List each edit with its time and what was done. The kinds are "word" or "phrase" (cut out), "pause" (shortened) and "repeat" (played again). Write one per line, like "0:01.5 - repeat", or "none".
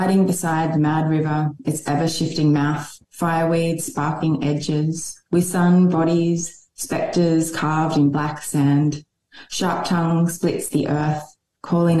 0:03.0 - pause
0:05.3 - pause

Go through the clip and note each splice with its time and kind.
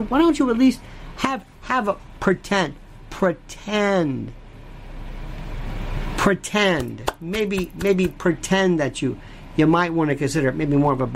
none

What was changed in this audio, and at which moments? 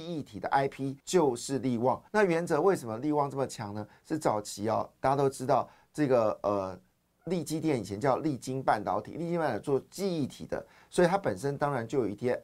0:01.0 - pause
0:02.1 - pause

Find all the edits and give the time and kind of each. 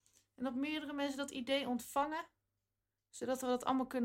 none

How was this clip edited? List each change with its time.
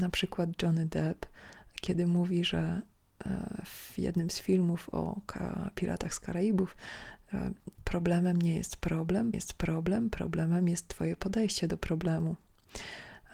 0:07.7 - pause
0:09.3 - repeat

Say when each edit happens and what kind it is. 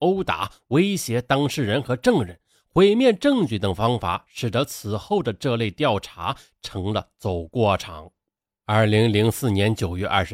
0:08.3 - pause

